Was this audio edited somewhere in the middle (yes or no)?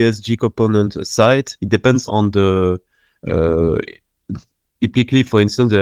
yes